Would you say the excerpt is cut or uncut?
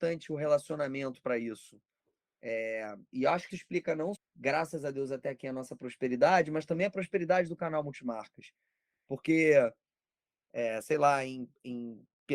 cut